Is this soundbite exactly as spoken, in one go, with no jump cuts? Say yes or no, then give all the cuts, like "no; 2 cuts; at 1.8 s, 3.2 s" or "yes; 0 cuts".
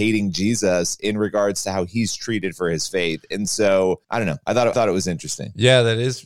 no; 2 cuts; at 4.0 s, 4.7 s